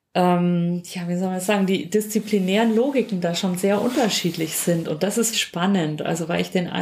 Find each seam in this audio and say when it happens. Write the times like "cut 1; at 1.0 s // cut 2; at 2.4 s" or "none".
cut 1; at 5.3 s